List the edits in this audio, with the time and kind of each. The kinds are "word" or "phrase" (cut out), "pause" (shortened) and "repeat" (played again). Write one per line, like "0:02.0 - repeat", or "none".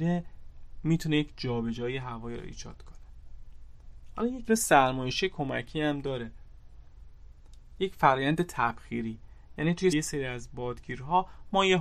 0:04.5 - word
0:09.9 - word